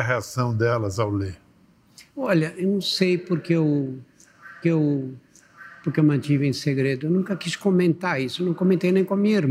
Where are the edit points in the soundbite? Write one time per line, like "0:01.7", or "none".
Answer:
0:02.1
0:04.6